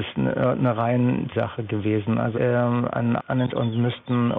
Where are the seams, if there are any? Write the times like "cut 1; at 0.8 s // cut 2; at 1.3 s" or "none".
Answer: cut 1; at 1.3 s // cut 2; at 2.3 s // cut 3; at 3.2 s // cut 4; at 3.5 s